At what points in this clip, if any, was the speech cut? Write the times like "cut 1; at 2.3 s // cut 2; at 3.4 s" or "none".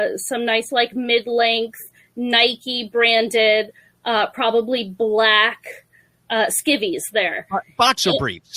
none

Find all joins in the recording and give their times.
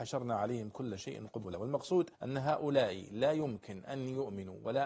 cut 1; at 2.1 s

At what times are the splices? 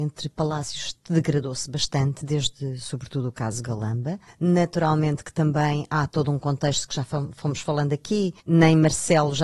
cut 1; at 1.0 s // cut 2; at 4.3 s // cut 3; at 8.4 s

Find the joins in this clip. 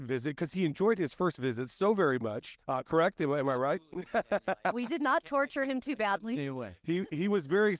cut 1; at 2.6 s

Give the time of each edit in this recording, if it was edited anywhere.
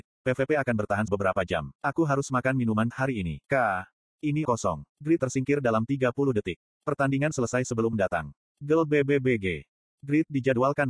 cut 1; at 1.1 s // cut 2; at 1.8 s // cut 3; at 2.9 s // cut 4; at 3.4 s // cut 5; at 4.4 s // cut 6; at 5.2 s // cut 7; at 7.3 s // cut 8; at 7.9 s

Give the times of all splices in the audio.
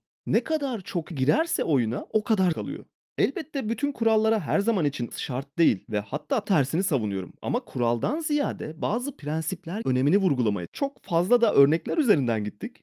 cut 1; at 1.1 s // cut 2; at 2.5 s // cut 3; at 5.1 s // cut 4; at 6.4 s // cut 5; at 9.8 s // cut 6; at 10.7 s

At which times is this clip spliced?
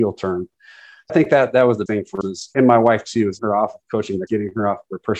cut 1; at 1.1 s // cut 2; at 1.9 s // cut 3; at 2.2 s // cut 4; at 2.5 s // cut 5; at 3.4 s // cut 6; at 4.3 s

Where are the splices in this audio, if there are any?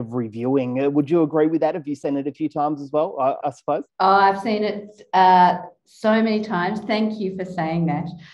cut 1; at 3.4 s // cut 2; at 3.9 s

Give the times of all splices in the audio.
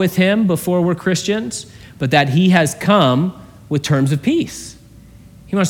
none

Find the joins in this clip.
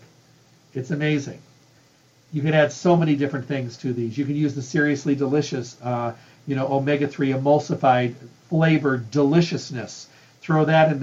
none

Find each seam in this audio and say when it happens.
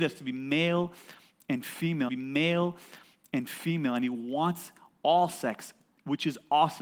cut 1; at 2.1 s

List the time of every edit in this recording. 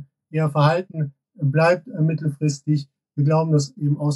none

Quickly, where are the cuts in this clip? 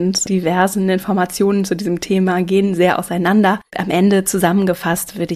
cut 1; at 3.7 s

